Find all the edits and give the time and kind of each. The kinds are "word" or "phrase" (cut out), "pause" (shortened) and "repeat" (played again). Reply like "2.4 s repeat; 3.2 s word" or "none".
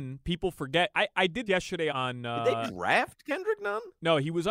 1.5 s word; 1.9 s word